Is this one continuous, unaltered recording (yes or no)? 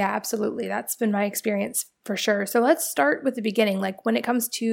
yes